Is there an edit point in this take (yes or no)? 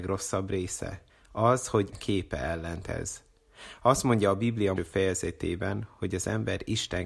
yes